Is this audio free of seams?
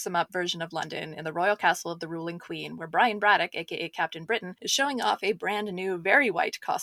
yes; 0 cuts

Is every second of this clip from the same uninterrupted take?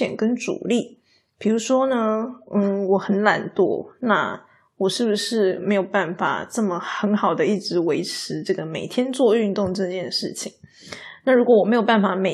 yes; 0 cuts

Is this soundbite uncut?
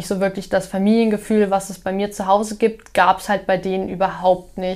yes; 0 cuts

